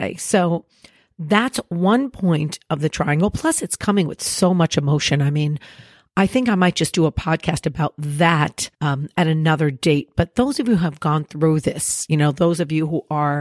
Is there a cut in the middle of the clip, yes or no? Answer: yes